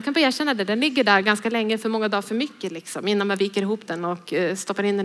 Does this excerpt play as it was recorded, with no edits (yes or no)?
yes